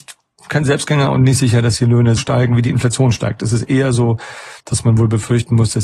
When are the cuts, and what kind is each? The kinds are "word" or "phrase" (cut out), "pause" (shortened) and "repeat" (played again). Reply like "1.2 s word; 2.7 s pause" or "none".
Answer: 2.2 s word; 4.6 s pause